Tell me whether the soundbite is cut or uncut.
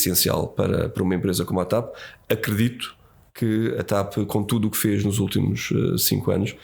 uncut